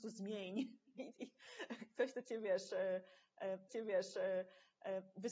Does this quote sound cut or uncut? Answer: cut